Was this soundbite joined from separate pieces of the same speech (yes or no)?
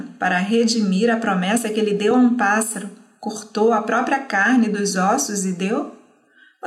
no